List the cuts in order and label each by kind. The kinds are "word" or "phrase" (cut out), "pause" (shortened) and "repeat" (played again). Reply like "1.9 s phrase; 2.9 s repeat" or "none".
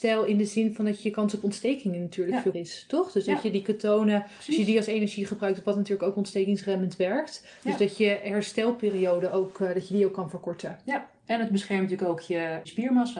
2.5 s word